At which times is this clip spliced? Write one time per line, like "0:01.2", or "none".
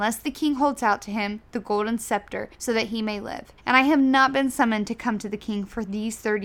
0:02.5
0:03.6